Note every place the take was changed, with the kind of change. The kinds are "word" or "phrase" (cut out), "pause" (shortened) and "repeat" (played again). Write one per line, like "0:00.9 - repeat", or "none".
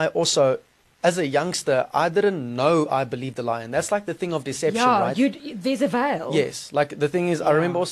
none